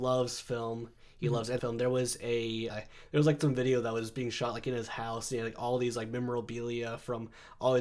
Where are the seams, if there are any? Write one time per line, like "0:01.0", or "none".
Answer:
0:01.6
0:02.7